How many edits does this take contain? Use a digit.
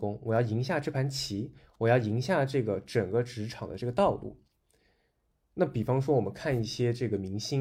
0